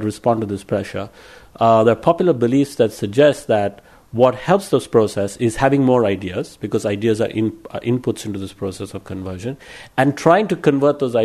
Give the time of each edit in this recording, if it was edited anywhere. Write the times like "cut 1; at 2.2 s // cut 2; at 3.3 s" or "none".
none